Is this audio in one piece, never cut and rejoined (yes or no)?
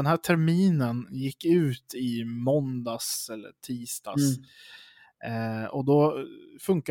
yes